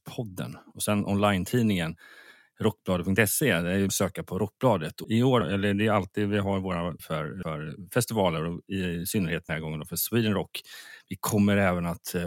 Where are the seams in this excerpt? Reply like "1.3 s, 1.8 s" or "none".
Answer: 3.9 s, 5.0 s, 5.4 s, 7.0 s, 7.4 s, 9.5 s